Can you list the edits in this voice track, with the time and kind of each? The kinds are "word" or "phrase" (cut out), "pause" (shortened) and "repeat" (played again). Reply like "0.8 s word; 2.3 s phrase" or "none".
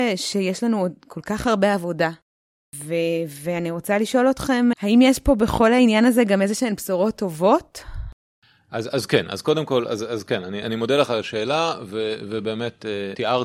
4.7 s word; 10.6 s word